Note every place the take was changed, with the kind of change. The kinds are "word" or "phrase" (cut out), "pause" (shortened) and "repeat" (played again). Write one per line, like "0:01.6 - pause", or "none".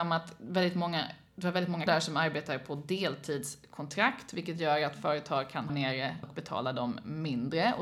0:01.9 - word
0:05.7 - word
0:06.2 - word